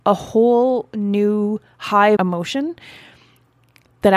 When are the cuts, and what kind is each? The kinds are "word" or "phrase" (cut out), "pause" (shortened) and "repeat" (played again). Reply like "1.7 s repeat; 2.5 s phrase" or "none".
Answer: 2.2 s word

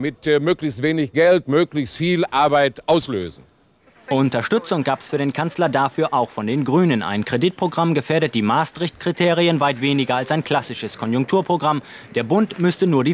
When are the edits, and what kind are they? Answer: none

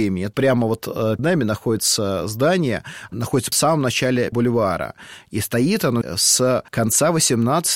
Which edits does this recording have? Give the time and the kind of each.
1.2 s word; 3.1 s word; 3.5 s word; 4.3 s word; 6.0 s word; 6.7 s pause

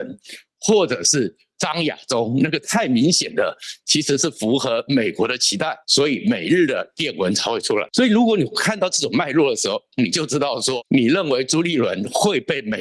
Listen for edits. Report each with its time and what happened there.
5.8 s pause

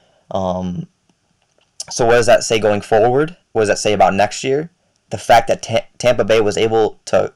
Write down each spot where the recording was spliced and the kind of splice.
3.4 s pause; 4.9 s pause

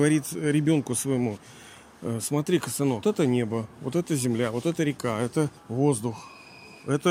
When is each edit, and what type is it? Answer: 3.0 s word; 5.6 s pause

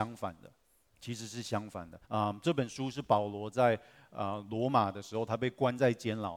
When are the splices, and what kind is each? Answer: 2.0 s pause

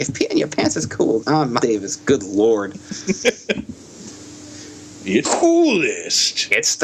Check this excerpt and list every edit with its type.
1.2 s word; 1.6 s word; 5.2 s word

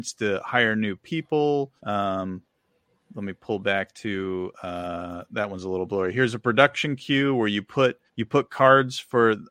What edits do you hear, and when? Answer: 1.8 s pause; 8.1 s pause

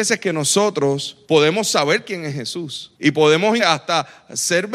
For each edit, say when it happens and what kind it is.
1.2 s pause; 2.9 s pause; 3.6 s word

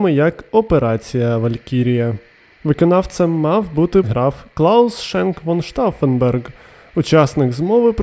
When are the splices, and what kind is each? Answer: 4.0 s word

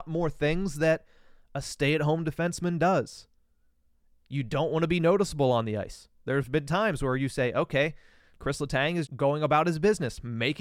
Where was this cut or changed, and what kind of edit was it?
8.3 s word; 9.1 s word

